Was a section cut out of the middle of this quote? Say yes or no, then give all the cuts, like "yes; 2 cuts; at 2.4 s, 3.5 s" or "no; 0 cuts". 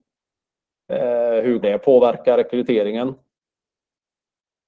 yes; 1 cut; at 1.6 s